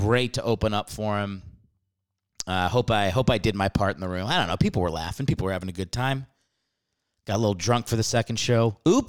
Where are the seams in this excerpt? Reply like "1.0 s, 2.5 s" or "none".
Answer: none